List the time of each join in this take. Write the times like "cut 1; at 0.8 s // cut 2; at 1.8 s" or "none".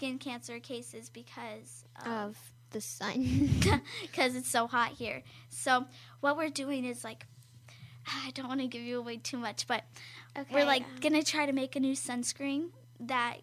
none